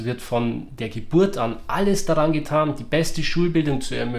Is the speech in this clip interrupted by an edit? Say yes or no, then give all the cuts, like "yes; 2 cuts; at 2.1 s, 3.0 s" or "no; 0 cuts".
no; 0 cuts